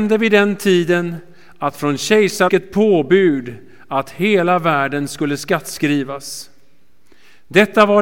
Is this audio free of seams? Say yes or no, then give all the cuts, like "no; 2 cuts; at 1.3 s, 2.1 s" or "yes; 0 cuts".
no; 1 cut; at 2.5 s